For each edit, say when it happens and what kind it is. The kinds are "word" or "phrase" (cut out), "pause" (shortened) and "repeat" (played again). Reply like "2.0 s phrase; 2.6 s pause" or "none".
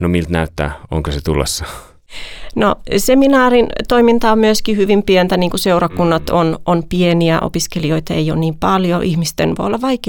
none